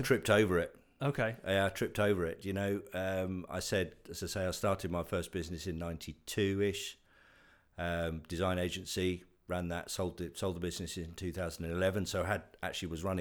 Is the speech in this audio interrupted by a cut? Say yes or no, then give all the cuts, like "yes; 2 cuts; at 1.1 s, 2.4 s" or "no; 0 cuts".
no; 0 cuts